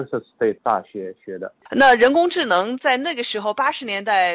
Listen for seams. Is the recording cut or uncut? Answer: cut